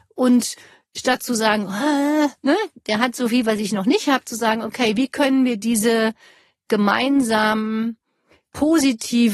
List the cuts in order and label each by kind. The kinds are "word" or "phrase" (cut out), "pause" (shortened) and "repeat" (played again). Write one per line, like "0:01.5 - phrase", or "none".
0:02.4 - pause